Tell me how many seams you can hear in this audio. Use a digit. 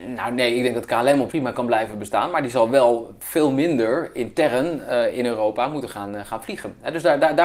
1